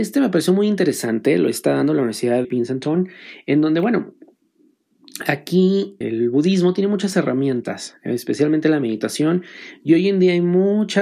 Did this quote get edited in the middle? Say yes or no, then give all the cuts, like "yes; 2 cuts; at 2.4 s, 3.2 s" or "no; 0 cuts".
yes; 2 cuts; at 2.4 s, 6.0 s